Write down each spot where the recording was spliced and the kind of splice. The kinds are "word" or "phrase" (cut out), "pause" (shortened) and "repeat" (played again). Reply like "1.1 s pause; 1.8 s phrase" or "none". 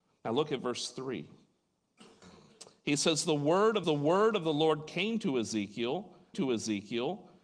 3.8 s repeat; 6.3 s repeat